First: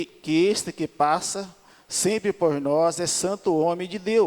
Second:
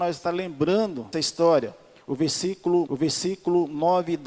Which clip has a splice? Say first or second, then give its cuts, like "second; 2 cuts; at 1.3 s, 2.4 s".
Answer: second; 2 cuts; at 1.1 s, 2.9 s